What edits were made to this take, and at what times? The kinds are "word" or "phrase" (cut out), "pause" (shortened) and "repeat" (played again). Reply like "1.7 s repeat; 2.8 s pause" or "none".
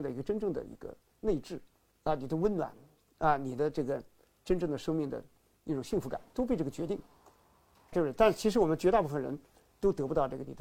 7.9 s word